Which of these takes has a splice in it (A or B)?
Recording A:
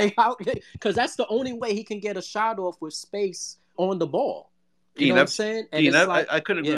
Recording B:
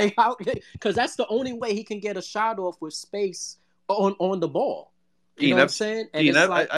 A